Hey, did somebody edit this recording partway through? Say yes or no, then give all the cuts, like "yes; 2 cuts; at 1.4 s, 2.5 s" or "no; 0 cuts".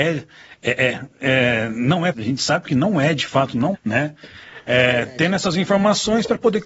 yes; 2 cuts; at 2.1 s, 3.7 s